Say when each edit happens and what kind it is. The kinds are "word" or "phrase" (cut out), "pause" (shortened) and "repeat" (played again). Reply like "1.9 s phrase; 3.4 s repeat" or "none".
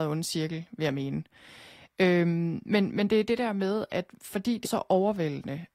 4.7 s word